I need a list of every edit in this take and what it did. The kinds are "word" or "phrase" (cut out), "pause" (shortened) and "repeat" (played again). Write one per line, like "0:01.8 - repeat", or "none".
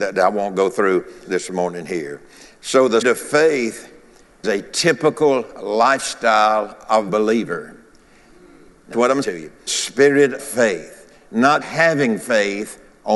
0:01.2 - word
0:03.0 - word
0:04.4 - word
0:07.1 - word
0:08.9 - word
0:09.2 - word
0:09.7 - word
0:10.4 - word
0:11.6 - word